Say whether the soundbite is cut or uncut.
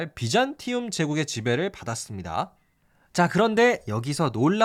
uncut